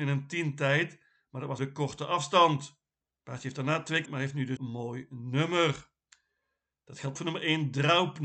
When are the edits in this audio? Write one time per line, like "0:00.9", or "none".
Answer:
0:01.6
0:04.1
0:04.6
0:07.2